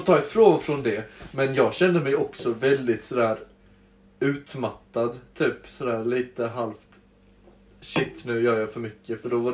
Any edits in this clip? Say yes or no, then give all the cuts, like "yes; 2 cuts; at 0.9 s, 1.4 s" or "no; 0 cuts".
no; 0 cuts